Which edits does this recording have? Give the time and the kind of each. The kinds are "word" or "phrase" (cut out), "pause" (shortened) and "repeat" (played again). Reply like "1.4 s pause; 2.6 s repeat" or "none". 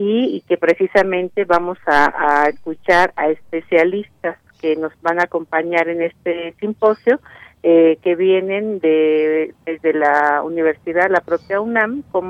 none